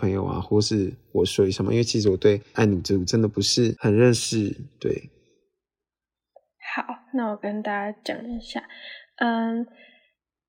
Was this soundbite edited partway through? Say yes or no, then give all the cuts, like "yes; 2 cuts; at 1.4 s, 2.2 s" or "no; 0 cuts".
no; 0 cuts